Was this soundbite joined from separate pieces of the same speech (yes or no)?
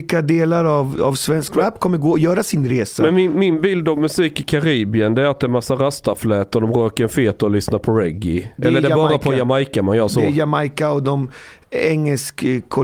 no